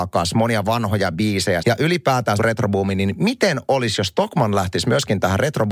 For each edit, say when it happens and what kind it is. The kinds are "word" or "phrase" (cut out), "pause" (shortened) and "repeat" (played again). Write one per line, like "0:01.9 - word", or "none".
0:01.6 - word
0:02.4 - word